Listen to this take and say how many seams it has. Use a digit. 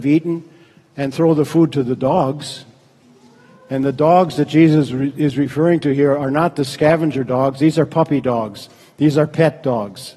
0